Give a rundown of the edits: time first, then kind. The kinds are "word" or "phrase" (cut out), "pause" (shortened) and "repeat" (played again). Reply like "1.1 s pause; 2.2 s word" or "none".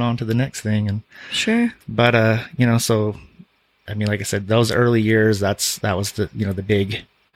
1.8 s pause